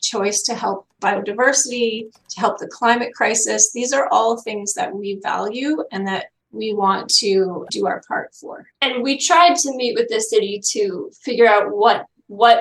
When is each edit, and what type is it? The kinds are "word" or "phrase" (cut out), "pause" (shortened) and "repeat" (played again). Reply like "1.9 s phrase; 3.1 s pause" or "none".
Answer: 1.0 s word; 6.4 s pause; 7.7 s word; 8.7 s pause